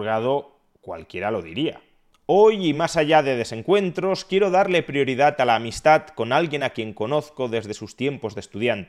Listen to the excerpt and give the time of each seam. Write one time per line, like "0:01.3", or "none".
none